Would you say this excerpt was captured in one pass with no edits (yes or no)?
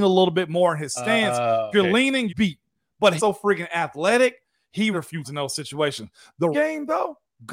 no